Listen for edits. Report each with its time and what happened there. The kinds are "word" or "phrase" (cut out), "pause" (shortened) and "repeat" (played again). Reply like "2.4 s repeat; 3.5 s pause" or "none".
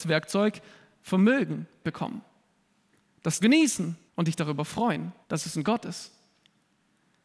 1.8 s word; 3.4 s phrase; 4.1 s pause; 5.2 s pause; 5.6 s word